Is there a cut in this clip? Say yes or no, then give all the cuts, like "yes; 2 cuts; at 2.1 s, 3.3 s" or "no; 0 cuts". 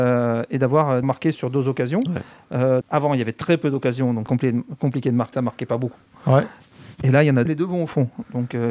yes; 6 cuts; at 1.0 s, 1.3 s, 2.8 s, 4.3 s, 5.3 s, 7.5 s